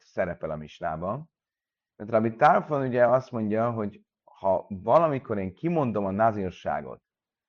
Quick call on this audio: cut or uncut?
uncut